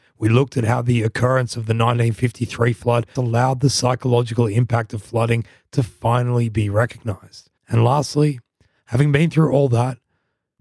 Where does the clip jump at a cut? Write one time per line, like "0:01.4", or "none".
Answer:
0:03.2
0:07.6